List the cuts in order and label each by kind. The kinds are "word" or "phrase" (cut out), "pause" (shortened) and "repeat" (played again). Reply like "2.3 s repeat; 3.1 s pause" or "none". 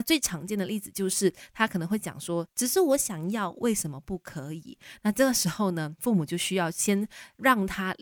2.5 s pause